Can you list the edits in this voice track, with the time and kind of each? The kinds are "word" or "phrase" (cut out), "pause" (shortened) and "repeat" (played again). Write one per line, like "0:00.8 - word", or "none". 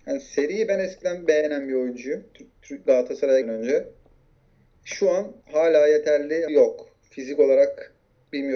0:03.4 - word
0:05.4 - pause
0:06.5 - word